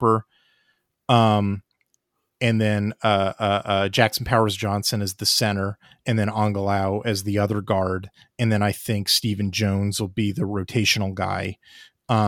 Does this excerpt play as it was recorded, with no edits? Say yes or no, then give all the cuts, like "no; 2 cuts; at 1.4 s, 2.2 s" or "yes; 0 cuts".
yes; 0 cuts